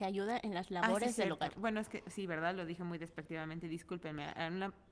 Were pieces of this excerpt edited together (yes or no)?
no